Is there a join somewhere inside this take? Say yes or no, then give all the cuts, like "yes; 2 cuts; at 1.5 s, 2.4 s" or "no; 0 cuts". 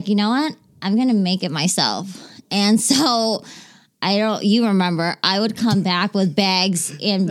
no; 0 cuts